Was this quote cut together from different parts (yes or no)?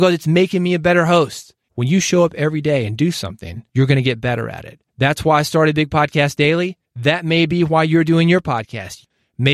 yes